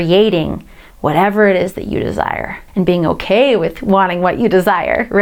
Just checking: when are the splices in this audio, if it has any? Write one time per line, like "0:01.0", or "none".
0:02.7